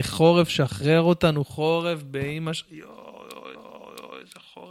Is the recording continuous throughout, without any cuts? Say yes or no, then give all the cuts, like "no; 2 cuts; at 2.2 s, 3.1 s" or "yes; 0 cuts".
no; 1 cut; at 3.5 s